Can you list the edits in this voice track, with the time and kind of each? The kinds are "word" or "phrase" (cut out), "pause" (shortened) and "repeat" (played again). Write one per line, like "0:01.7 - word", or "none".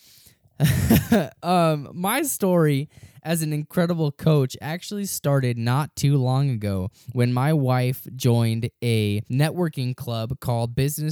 0:07.0 - pause
0:09.3 - pause